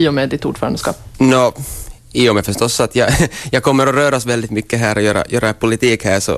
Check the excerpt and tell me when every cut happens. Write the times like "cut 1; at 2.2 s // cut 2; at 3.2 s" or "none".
none